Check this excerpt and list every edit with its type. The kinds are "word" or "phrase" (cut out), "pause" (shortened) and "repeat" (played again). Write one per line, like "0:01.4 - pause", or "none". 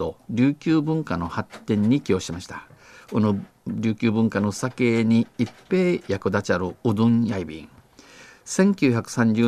none